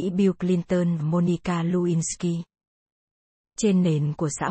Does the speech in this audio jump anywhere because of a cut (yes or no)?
yes